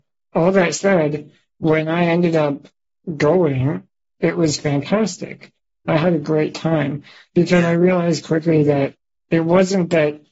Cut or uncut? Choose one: uncut